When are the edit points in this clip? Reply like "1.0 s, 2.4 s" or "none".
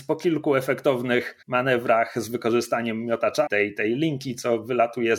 1.4 s, 3.5 s